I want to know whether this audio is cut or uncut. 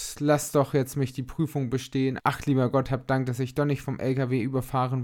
uncut